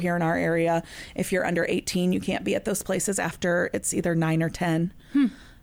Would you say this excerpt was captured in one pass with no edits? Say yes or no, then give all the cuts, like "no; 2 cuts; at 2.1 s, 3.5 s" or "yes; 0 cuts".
yes; 0 cuts